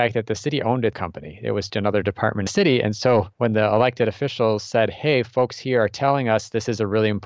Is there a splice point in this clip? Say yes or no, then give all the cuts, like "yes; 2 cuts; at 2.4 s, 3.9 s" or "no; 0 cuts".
yes; 4 cuts; at 0.9 s, 1.7 s, 2.5 s, 3.3 s